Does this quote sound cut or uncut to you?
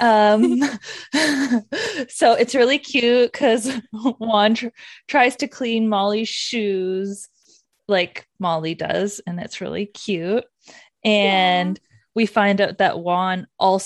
uncut